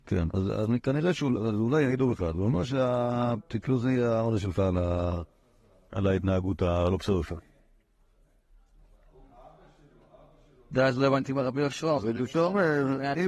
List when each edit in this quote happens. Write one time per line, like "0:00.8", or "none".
none